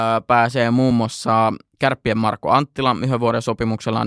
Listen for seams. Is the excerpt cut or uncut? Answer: uncut